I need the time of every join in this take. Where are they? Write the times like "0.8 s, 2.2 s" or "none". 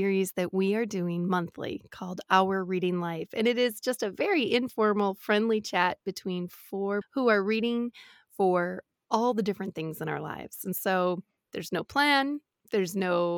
7.0 s